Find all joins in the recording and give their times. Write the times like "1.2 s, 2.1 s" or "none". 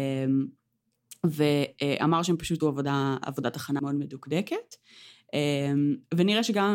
2.6 s, 3.8 s